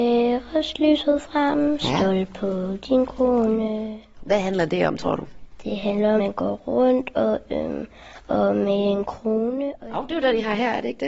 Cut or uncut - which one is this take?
cut